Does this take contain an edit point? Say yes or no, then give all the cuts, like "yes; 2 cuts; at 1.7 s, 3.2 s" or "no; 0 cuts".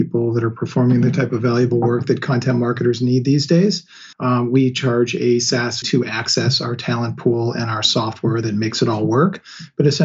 yes; 2 cuts; at 4.1 s, 5.8 s